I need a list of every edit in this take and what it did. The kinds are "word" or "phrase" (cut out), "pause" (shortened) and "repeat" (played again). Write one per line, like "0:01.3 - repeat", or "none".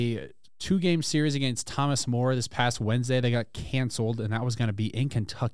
none